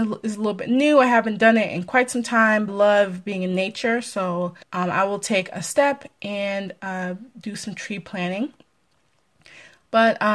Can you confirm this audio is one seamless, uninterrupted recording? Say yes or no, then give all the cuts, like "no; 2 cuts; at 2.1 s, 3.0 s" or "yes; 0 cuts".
no; 2 cuts; at 2.7 s, 4.6 s